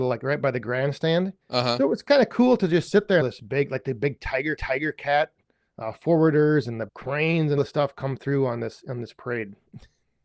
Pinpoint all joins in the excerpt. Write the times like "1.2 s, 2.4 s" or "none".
1.4 s, 3.2 s, 4.6 s, 6.9 s, 7.6 s